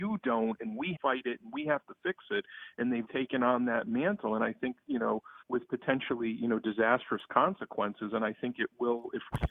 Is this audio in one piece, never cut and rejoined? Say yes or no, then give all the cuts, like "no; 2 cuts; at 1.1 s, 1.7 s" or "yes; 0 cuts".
no; 3 cuts; at 0.9 s, 3.0 s, 5.4 s